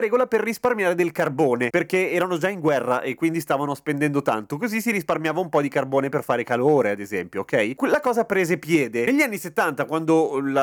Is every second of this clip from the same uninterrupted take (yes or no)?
yes